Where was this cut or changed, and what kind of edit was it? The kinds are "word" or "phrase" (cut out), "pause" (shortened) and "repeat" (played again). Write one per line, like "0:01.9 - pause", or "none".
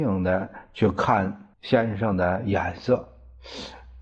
0:01.5 - pause